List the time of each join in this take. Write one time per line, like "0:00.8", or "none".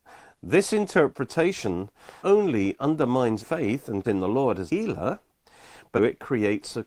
0:02.2
0:03.4
0:04.0
0:04.7
0:06.0

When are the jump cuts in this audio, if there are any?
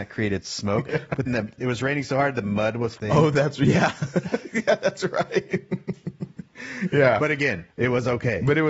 0:01.3
0:01.6
0:03.0
0:07.7

